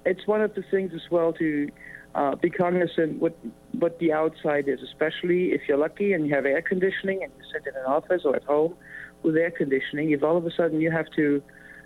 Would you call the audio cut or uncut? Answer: uncut